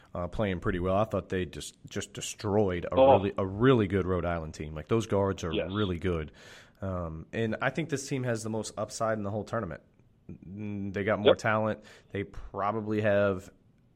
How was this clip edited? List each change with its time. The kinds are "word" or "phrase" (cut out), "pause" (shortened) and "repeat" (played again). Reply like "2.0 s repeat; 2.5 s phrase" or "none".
none